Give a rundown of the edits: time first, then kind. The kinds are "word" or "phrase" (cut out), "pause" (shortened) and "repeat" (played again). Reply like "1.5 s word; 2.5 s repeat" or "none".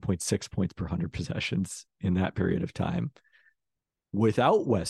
none